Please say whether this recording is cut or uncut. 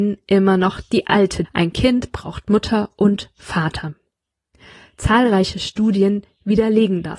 cut